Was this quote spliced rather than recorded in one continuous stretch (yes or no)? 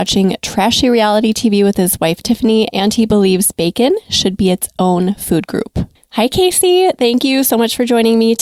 no